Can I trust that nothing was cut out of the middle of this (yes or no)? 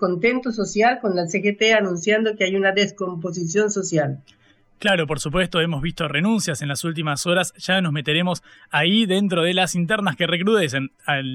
yes